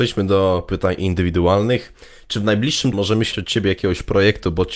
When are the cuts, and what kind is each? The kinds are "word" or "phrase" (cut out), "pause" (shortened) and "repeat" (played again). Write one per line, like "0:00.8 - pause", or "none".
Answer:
0:02.9 - word
0:03.3 - word